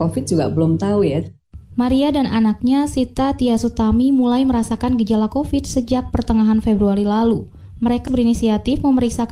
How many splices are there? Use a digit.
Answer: 1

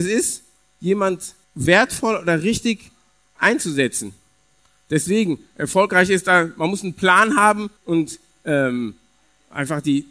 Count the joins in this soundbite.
3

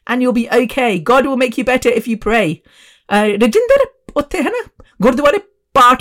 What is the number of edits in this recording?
0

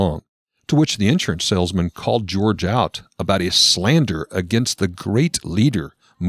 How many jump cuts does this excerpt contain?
0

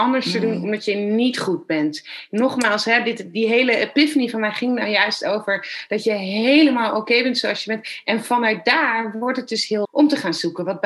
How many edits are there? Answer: 1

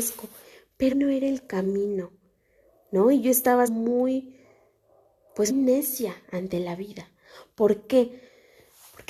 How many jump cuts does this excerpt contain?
3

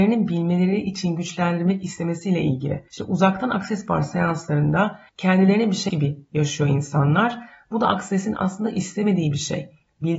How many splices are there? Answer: 3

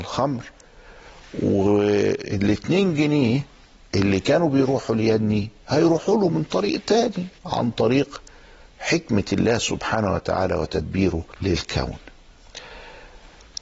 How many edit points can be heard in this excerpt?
2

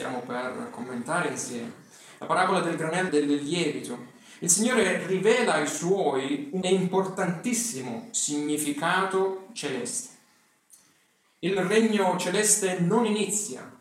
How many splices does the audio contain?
2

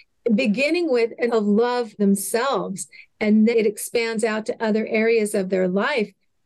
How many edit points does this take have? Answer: 3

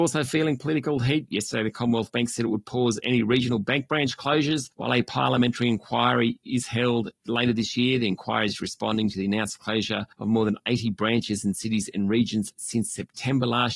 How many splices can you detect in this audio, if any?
2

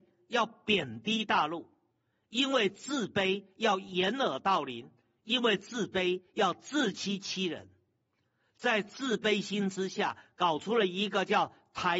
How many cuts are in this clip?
0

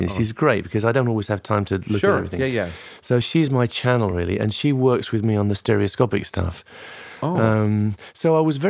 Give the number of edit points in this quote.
0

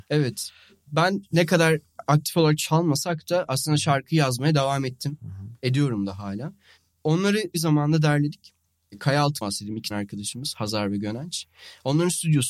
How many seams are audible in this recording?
3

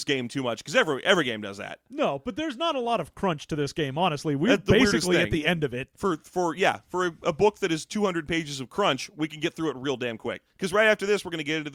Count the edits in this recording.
1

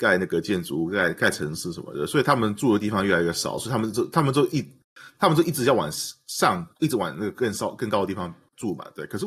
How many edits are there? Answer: 1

